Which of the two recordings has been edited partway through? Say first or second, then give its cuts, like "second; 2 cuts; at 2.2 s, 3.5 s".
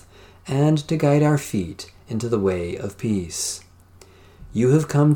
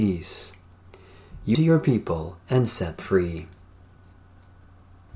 second; 3 cuts; at 1.5 s, 2.4 s, 3.0 s